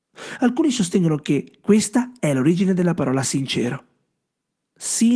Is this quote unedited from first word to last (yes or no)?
yes